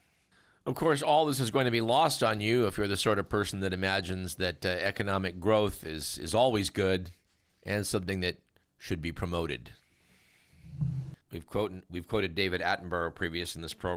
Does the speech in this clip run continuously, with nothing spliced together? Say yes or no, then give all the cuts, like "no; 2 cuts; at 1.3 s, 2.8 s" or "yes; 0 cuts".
no; 1 cut; at 11.2 s